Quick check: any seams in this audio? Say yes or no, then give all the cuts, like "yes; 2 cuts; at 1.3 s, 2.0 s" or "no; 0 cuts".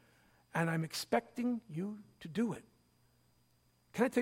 no; 0 cuts